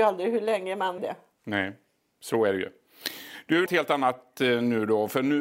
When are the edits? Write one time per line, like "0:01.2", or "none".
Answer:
0:01.0
0:03.7